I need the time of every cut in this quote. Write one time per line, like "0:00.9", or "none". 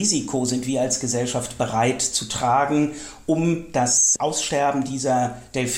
none